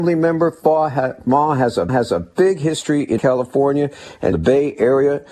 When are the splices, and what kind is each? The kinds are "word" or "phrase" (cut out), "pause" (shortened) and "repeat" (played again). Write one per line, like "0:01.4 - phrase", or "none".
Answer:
0:01.9 - repeat
0:03.2 - word
0:04.3 - word